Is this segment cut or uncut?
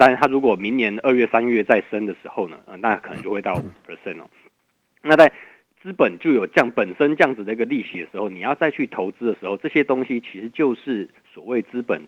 uncut